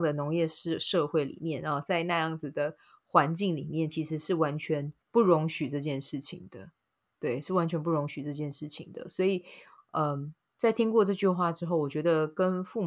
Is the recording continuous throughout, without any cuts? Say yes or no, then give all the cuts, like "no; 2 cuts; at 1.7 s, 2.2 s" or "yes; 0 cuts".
no; 1 cut; at 5.0 s